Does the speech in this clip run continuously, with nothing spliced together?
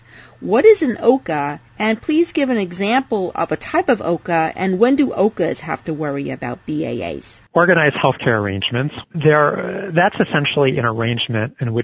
no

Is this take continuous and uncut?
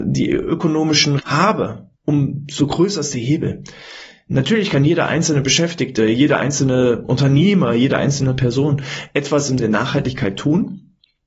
no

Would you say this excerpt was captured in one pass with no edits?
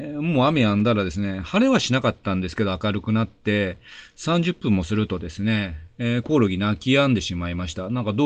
yes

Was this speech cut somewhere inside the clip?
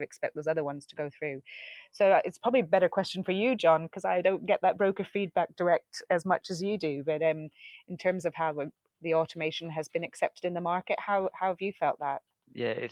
no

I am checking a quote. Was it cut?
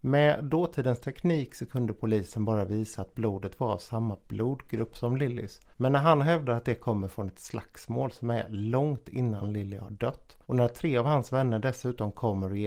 yes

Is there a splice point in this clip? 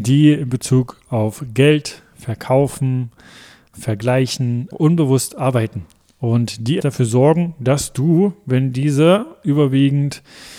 yes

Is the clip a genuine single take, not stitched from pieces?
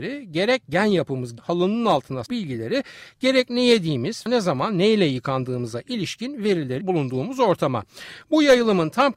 no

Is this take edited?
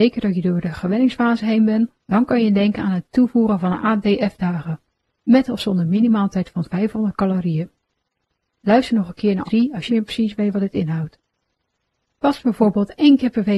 yes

